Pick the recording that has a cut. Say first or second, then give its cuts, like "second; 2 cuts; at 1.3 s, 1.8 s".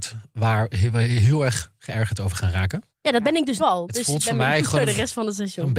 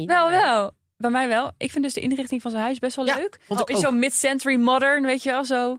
first; 2 cuts; at 2.9 s, 3.6 s